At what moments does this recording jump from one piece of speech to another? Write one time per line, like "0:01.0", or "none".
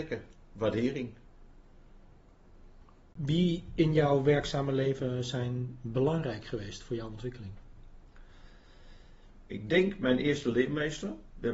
none